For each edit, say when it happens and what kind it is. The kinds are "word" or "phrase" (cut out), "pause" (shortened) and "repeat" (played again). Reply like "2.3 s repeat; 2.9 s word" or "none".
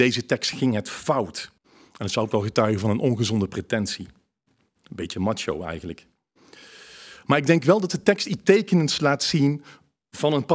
1.6 s pause